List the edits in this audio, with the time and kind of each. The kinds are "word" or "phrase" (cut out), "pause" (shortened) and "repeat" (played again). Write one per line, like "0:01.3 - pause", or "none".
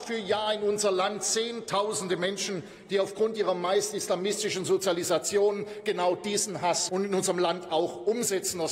0:06.9 - word